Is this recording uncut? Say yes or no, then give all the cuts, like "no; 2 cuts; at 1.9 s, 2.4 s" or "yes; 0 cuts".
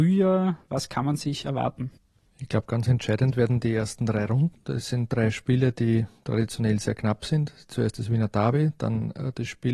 yes; 0 cuts